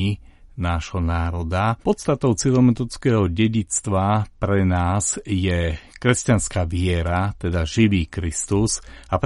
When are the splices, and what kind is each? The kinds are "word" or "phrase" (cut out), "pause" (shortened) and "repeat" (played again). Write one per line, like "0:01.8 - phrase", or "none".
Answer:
0:01.8 - pause